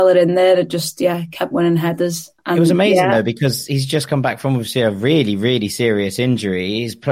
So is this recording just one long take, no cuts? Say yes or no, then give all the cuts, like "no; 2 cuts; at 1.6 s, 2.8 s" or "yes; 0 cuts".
no; 1 cut; at 2.4 s